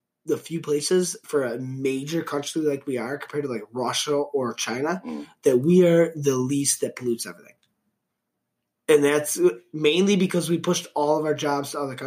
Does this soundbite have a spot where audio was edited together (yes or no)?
no